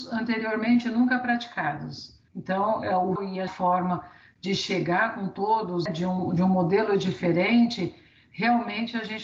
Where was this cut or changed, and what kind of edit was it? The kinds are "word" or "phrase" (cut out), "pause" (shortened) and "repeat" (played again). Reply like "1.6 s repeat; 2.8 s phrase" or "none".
2.3 s pause; 3.2 s word; 3.5 s phrase; 5.9 s word